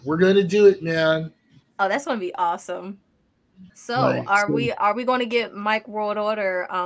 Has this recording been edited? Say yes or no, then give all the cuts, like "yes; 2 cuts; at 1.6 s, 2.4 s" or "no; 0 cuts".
yes; 2 cuts; at 1.6 s, 3.7 s